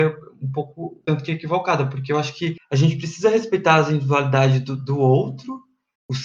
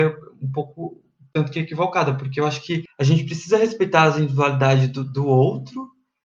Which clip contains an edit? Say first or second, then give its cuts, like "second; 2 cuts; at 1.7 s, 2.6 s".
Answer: first; 1 cut; at 1.0 s